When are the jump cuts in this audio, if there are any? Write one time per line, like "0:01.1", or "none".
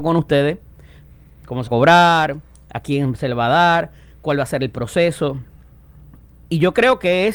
0:01.7